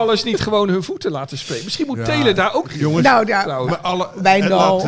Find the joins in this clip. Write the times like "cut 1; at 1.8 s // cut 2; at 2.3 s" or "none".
cut 1; at 2.6 s // cut 2; at 3.7 s